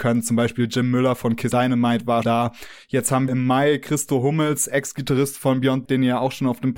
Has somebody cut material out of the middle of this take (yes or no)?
yes